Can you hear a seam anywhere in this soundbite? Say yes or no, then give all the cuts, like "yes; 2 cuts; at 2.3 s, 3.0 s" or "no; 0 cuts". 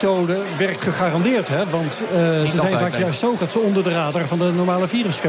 yes; 1 cut; at 3.4 s